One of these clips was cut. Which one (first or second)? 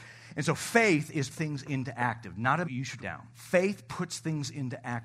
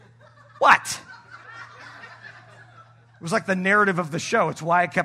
first